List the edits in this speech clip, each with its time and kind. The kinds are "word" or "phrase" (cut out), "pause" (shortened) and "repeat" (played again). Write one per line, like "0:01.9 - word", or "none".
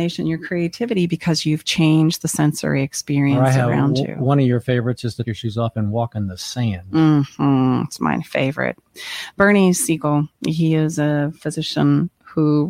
0:05.2 - word
0:10.4 - pause